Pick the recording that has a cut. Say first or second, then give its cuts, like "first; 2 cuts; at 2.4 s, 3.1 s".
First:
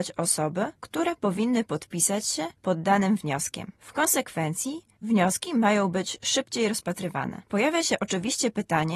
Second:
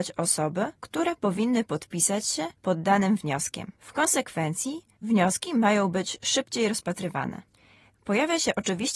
first; 1 cut; at 7.5 s